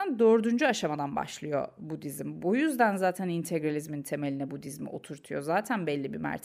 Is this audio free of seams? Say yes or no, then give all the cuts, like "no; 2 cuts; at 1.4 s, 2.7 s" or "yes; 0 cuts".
yes; 0 cuts